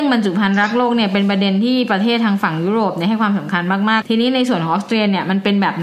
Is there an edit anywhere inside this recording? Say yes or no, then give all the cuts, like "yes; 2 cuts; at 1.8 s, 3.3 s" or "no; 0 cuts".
yes; 1 cut; at 4.0 s